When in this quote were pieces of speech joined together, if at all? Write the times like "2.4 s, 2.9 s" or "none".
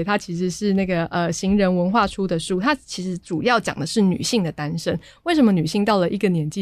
none

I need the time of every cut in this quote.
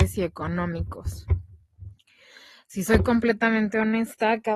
none

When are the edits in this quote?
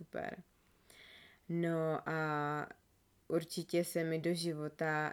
none

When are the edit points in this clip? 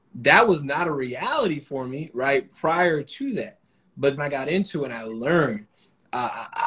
4.2 s

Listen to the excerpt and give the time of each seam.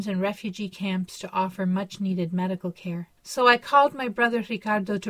3.2 s

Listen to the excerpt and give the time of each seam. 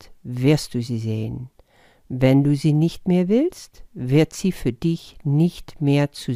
none

